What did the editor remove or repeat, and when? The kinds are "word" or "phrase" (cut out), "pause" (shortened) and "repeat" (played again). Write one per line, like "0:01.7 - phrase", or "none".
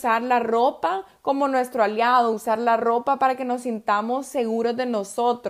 none